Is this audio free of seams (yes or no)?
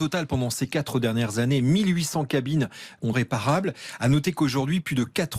no